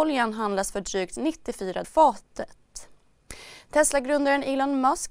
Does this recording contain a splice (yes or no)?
yes